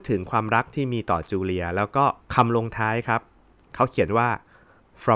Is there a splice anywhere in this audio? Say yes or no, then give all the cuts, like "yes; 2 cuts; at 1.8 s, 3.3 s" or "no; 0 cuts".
yes; 1 cut; at 2.2 s